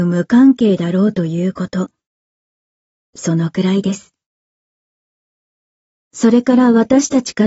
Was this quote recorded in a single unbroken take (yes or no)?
yes